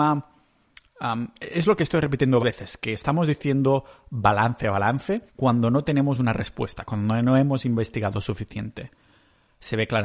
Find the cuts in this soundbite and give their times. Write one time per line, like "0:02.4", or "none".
0:02.4
0:04.6
0:05.3